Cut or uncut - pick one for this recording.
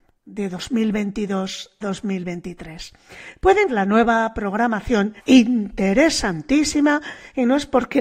cut